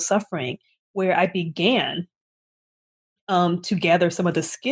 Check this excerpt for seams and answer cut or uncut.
uncut